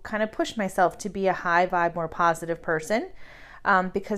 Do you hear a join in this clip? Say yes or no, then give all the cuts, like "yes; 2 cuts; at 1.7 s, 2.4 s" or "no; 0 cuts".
no; 0 cuts